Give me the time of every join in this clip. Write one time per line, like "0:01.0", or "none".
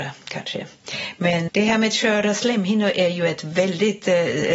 0:01.5